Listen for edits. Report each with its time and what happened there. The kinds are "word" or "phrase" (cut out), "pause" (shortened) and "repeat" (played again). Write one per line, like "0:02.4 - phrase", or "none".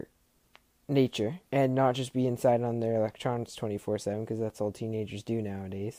0:01.5 - pause